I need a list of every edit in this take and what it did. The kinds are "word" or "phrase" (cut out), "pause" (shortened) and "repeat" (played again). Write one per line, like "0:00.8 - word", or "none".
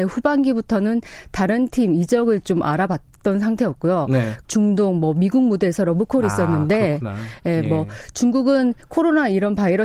0:04.4 - phrase

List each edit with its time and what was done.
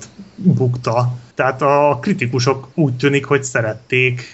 0:01.3 - pause
0:02.7 - pause

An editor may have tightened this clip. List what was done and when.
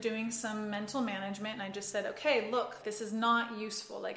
0:02.8 - word

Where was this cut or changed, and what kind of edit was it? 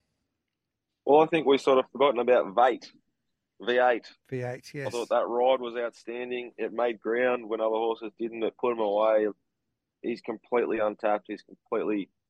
none

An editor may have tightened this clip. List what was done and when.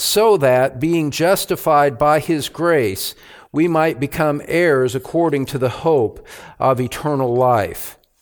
none

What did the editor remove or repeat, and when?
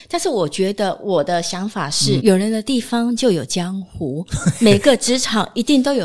0:02.2 - word

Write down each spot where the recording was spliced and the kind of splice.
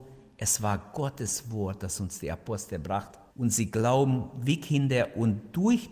0:03.3 - pause

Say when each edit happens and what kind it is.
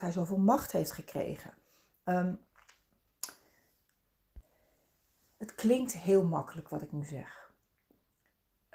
none

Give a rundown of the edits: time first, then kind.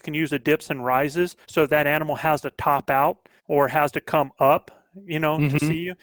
0:01.4 - pause
0:03.4 - pause

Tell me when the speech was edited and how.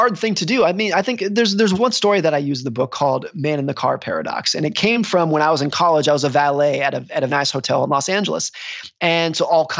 0:07.3 - word

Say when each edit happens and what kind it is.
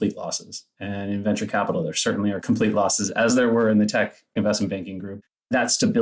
none

